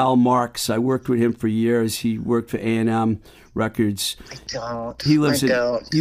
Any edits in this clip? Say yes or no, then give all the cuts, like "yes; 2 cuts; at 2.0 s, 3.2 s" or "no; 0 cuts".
no; 0 cuts